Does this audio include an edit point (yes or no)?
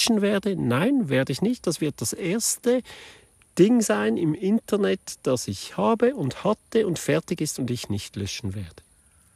no